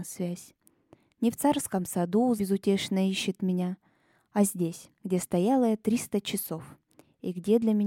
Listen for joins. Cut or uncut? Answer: cut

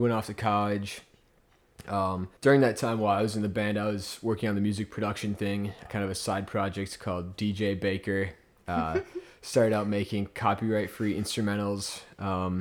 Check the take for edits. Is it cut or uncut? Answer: cut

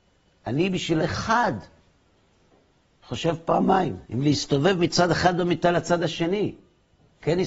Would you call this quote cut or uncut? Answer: cut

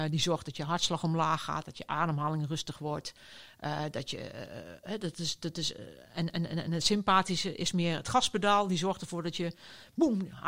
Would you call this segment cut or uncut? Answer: uncut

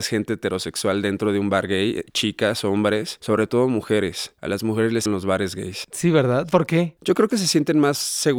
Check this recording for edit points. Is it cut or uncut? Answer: cut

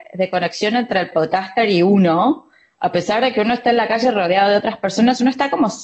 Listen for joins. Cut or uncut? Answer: uncut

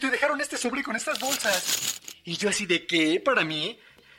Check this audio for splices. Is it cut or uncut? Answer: uncut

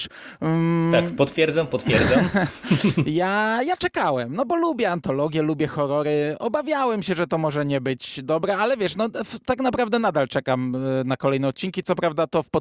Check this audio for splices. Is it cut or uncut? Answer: uncut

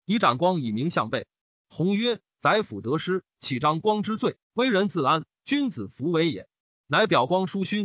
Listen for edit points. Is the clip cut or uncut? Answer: cut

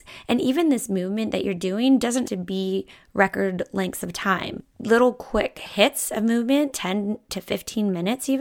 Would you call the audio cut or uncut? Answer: cut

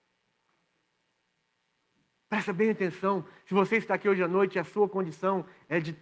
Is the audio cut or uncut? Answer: uncut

